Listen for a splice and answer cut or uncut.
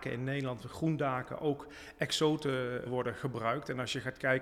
cut